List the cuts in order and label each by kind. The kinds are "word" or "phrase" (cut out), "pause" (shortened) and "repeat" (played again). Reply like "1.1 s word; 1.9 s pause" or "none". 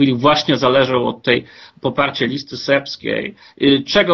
none